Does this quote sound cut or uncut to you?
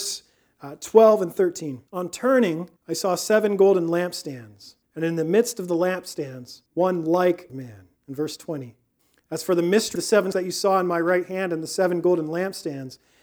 cut